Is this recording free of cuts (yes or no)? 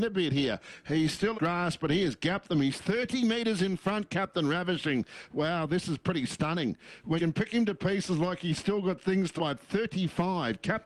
no